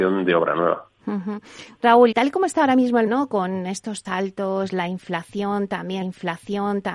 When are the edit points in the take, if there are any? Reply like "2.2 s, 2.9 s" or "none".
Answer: 2.1 s, 3.1 s, 4.0 s, 6.0 s